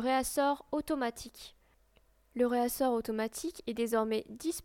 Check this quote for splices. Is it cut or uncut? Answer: uncut